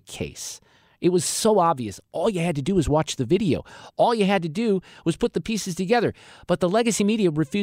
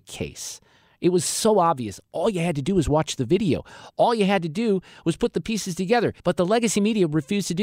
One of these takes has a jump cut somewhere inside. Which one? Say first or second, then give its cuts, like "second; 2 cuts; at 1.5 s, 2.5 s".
second; 1 cut; at 6.2 s